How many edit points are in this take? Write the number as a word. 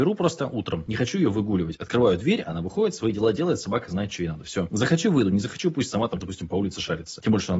one